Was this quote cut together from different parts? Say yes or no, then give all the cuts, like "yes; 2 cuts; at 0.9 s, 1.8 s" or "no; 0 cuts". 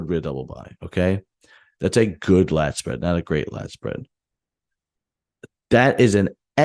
no; 0 cuts